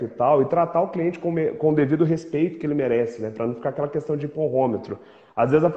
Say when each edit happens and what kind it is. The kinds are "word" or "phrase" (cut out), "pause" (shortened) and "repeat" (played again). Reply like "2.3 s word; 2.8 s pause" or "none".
none